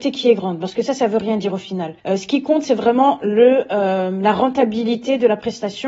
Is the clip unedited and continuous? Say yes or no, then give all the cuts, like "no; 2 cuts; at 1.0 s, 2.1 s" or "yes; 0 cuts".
no; 1 cut; at 2.0 s